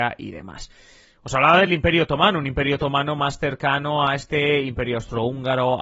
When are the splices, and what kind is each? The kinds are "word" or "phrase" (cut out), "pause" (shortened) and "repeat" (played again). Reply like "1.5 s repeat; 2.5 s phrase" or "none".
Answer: none